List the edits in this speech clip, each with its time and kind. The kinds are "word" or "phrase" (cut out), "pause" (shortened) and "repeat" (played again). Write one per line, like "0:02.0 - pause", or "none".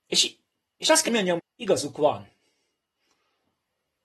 0:01.1 - word
0:01.4 - word